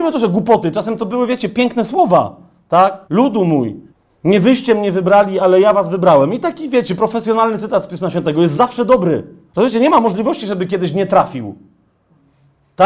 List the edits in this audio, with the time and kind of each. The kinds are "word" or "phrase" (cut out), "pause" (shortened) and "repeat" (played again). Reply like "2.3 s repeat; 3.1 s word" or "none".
3.0 s pause; 3.9 s pause; 9.5 s pause